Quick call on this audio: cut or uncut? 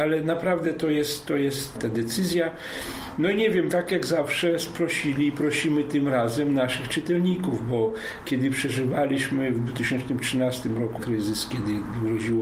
cut